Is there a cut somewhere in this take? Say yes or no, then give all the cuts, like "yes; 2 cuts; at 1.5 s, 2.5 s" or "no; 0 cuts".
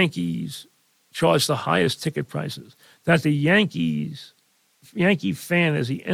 no; 0 cuts